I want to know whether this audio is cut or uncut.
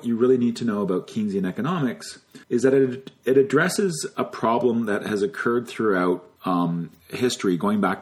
cut